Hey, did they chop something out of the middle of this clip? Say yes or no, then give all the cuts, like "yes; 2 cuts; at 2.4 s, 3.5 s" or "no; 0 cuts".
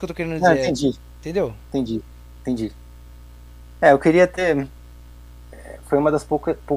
no; 0 cuts